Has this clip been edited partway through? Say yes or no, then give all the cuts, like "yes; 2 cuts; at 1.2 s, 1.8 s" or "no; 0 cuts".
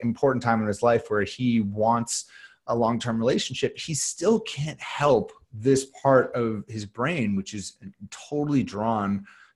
no; 0 cuts